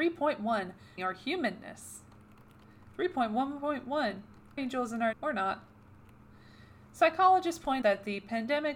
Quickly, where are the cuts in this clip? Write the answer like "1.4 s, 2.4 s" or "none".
1.0 s, 4.6 s, 5.1 s, 7.8 s